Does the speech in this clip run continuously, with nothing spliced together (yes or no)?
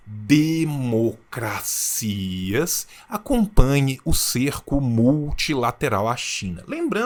yes